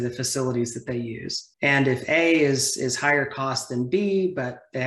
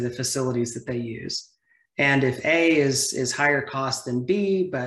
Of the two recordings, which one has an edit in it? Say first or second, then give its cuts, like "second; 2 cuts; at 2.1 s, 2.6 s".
first; 1 cut; at 1.5 s